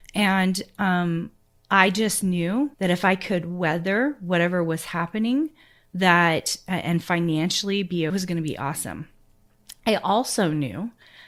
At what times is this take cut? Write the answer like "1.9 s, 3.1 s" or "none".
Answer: 2.7 s, 8.1 s